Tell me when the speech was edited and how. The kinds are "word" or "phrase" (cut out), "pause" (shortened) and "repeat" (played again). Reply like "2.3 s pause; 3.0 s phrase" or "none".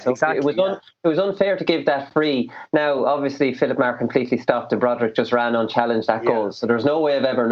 none